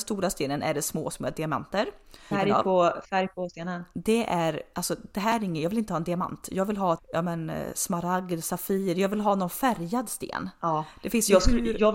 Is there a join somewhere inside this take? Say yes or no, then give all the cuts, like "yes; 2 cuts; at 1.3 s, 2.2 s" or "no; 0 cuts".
yes; 3 cuts; at 1.1 s, 2.3 s, 7.0 s